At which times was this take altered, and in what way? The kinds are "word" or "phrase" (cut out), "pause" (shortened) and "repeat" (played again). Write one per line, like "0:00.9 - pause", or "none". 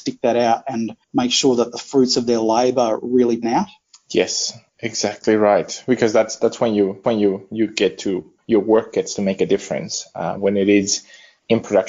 0:03.4 - word
0:07.0 - repeat
0:10.3 - word